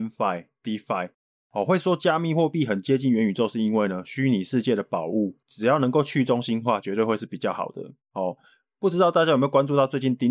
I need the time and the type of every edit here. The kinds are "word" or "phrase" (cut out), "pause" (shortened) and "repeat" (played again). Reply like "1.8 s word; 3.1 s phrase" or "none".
none